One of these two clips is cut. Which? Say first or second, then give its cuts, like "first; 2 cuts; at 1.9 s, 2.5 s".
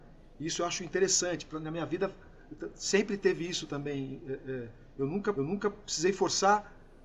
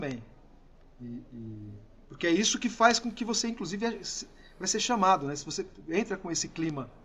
first; 1 cut; at 5.4 s